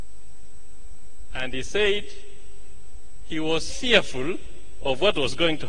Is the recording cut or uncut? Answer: cut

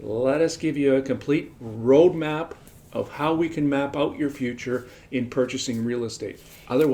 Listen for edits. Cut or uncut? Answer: uncut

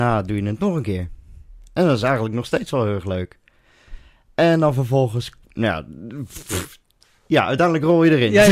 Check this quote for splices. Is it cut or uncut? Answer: uncut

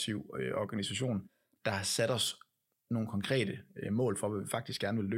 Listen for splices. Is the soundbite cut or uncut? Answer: uncut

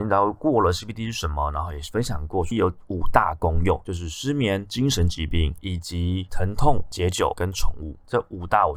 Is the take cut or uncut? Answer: cut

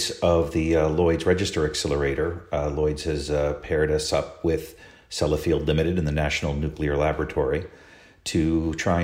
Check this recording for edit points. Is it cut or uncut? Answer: uncut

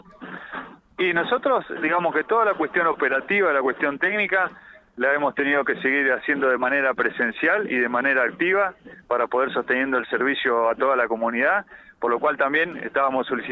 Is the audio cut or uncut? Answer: uncut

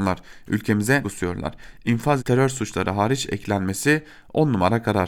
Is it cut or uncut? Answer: cut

